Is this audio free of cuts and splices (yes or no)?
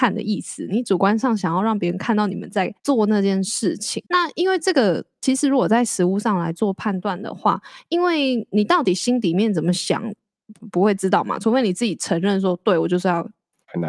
no